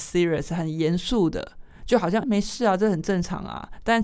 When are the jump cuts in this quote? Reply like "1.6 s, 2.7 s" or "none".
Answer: 2.2 s